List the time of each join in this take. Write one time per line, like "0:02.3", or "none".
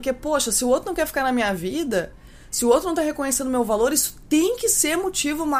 none